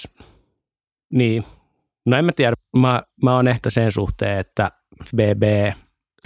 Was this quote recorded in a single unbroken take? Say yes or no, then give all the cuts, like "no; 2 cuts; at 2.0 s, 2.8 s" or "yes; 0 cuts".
no; 2 cuts; at 3.6 s, 5.1 s